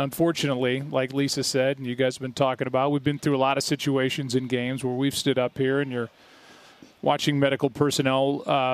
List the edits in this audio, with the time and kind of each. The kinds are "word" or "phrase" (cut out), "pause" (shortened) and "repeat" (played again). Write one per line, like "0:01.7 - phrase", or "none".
none